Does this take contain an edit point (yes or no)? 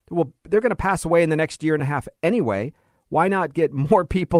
no